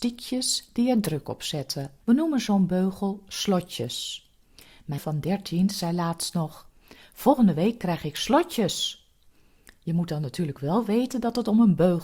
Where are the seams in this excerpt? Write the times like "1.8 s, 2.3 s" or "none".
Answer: 2.0 s, 5.0 s

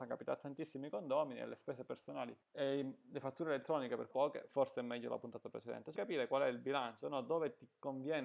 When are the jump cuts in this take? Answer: 2.4 s, 4.1 s, 6.0 s

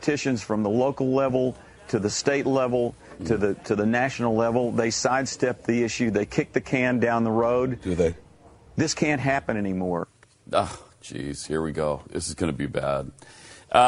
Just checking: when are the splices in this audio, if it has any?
none

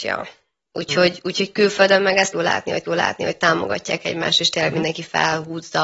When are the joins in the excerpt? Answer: 2.3 s, 2.8 s

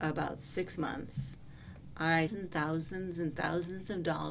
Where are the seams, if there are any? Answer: 2.3 s

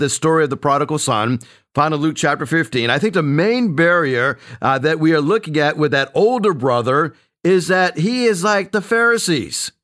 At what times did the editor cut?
none

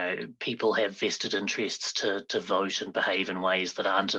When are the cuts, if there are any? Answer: none

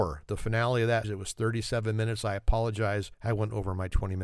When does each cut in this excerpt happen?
1.0 s, 3.1 s

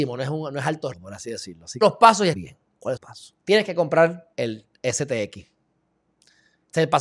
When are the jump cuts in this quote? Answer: 0.9 s, 1.8 s, 2.3 s, 3.0 s, 3.4 s, 4.3 s

